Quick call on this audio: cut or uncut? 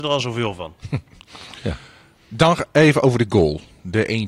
uncut